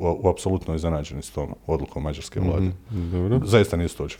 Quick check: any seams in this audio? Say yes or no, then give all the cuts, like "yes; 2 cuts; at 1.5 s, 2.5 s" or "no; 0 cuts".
yes; 1 cut; at 1.6 s